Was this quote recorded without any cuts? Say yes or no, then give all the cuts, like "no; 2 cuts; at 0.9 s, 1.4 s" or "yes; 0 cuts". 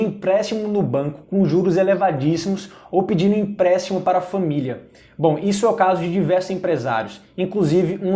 yes; 0 cuts